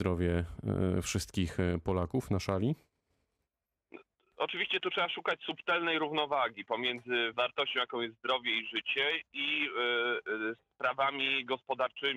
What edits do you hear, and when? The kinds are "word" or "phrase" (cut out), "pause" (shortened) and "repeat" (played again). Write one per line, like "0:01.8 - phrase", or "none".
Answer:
none